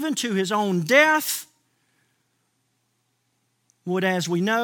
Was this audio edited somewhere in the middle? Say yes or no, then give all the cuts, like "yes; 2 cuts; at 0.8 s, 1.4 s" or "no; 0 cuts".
no; 0 cuts